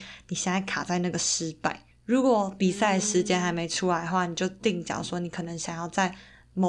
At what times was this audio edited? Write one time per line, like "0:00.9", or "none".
0:01.9